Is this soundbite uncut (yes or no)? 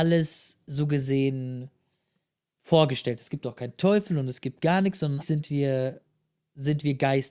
no